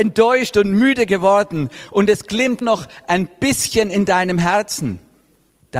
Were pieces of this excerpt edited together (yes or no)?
yes